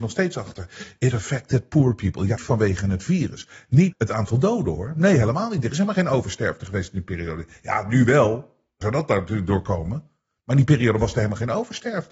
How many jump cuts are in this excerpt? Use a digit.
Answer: 4